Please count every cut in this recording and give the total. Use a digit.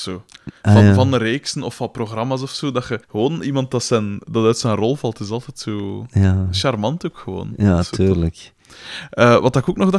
1